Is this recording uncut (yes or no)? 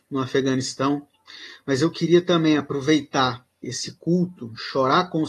no